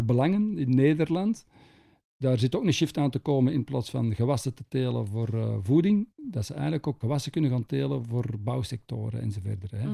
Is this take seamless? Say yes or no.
no